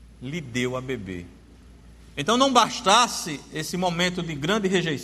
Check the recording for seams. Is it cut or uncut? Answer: uncut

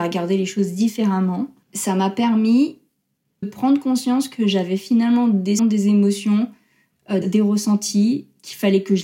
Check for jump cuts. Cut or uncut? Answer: cut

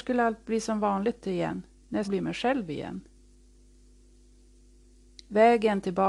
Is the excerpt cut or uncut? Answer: cut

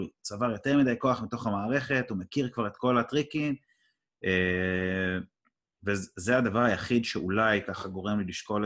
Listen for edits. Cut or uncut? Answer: uncut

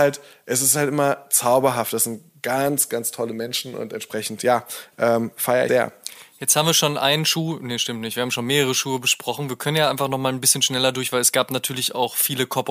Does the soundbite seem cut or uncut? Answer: cut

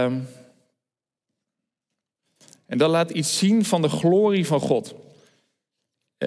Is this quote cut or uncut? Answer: uncut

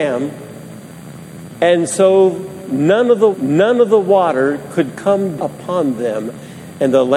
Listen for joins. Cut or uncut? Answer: cut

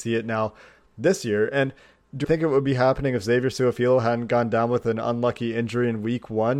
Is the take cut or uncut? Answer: cut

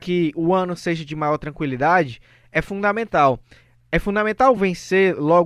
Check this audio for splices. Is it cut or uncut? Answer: uncut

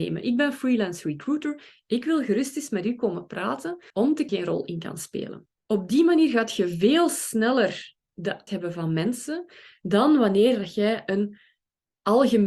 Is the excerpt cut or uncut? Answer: cut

